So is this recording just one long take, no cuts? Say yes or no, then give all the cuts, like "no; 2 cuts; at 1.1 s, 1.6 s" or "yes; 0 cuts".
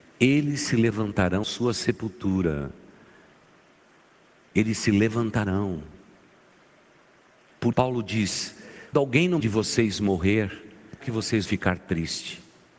no; 6 cuts; at 1.4 s, 7.7 s, 8.9 s, 9.4 s, 11.0 s, 11.5 s